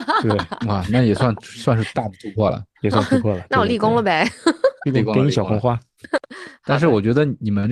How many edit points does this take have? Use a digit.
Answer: 1